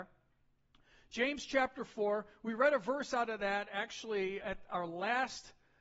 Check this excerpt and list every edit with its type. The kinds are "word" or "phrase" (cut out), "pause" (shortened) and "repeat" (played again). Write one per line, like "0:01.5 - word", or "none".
0:04.4 - word